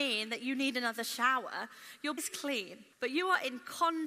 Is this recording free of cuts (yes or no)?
no